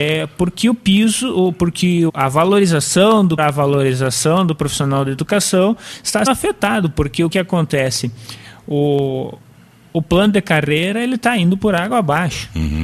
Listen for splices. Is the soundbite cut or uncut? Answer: cut